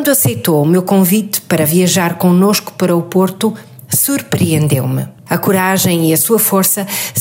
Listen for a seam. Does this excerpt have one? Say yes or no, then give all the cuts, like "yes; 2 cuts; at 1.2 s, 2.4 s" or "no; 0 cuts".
yes; 1 cut; at 5.2 s